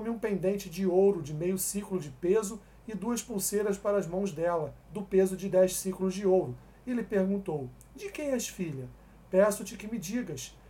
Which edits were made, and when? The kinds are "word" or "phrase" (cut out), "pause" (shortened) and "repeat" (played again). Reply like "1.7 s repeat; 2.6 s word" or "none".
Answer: none